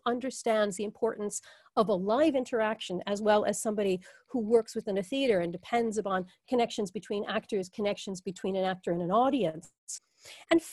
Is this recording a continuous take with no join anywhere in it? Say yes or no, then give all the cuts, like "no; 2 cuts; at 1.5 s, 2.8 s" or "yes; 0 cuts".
yes; 0 cuts